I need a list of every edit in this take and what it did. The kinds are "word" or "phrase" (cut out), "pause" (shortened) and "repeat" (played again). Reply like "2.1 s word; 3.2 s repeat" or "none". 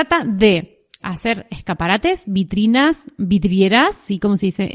1.0 s word